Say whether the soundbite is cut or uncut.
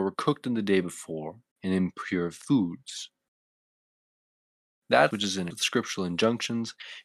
cut